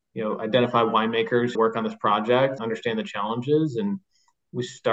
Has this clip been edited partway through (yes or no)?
yes